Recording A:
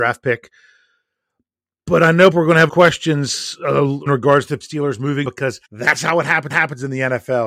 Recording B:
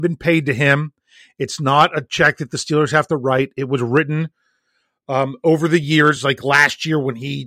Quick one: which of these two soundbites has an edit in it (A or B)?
A